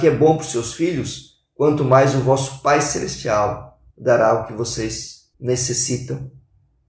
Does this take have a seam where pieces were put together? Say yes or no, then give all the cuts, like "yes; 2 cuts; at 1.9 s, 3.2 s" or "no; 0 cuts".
yes; 2 cuts; at 3.9 s, 5.3 s